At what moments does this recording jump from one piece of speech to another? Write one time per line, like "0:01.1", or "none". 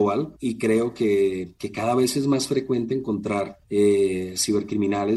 none